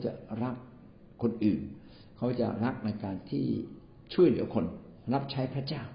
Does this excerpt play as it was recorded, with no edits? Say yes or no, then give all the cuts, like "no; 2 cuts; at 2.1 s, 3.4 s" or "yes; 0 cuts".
no; 1 cut; at 5.0 s